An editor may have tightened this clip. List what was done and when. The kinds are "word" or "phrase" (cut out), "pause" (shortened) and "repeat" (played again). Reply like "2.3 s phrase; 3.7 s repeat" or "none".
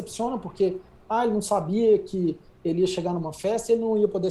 none